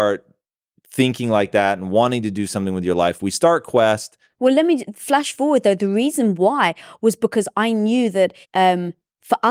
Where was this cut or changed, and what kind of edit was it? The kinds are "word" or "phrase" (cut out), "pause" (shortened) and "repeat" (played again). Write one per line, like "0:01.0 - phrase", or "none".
0:08.4 - pause